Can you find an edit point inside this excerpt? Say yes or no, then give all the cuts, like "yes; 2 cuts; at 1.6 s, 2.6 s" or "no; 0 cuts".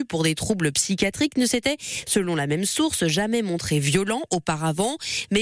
no; 0 cuts